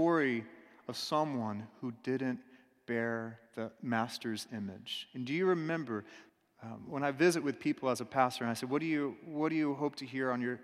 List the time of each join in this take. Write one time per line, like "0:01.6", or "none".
0:03.5
0:06.3